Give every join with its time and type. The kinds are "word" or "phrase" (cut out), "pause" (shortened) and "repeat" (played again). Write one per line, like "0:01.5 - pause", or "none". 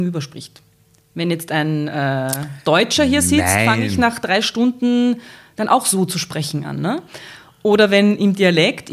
none